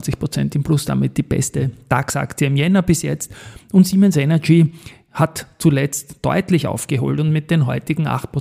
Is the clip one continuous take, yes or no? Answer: yes